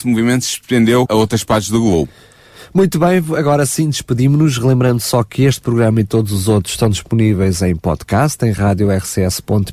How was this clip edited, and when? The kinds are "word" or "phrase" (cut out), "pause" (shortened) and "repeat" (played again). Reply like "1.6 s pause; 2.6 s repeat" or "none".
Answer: 1.1 s word